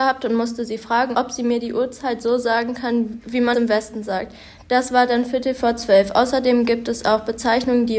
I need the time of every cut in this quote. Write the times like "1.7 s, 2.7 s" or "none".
3.5 s